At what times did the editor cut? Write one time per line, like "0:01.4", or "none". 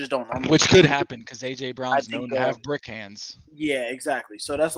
none